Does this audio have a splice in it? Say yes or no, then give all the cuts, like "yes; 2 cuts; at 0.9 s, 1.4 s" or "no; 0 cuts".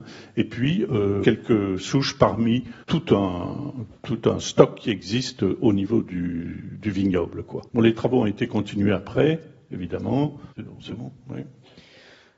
yes; 4 cuts; at 1.2 s, 2.8 s, 7.7 s, 10.5 s